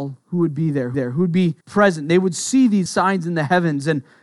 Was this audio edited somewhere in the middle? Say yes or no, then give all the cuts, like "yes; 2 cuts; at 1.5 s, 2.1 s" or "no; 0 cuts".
yes; 3 cuts; at 0.9 s, 1.6 s, 2.9 s